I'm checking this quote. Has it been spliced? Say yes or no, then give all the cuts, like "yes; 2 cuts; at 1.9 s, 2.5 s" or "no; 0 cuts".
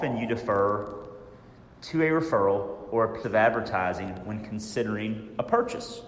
yes; 2 cuts; at 1.6 s, 3.2 s